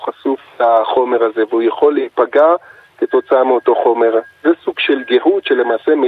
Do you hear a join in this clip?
no; 0 cuts

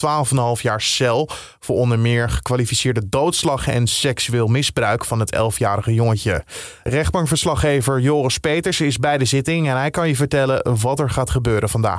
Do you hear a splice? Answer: no; 0 cuts

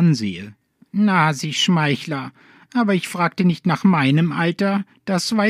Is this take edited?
no; 0 cuts

